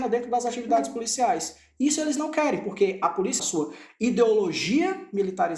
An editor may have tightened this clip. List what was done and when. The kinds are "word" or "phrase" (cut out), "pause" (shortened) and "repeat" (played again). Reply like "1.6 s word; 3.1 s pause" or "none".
3.4 s phrase